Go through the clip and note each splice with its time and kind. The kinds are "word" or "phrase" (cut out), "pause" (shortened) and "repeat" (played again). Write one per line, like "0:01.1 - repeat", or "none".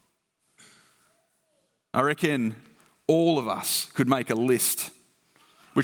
none